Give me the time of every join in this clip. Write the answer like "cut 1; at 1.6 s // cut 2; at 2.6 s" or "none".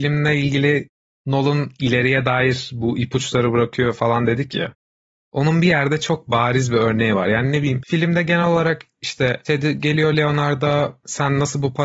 none